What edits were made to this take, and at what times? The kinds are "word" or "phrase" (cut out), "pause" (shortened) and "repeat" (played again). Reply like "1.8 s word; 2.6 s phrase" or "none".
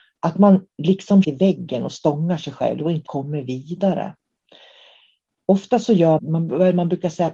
1.2 s phrase; 3.1 s word; 6.2 s word